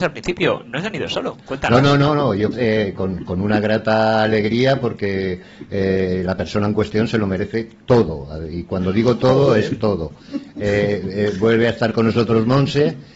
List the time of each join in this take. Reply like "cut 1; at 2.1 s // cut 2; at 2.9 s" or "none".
cut 1; at 2.5 s